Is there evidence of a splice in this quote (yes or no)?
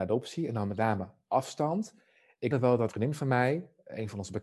yes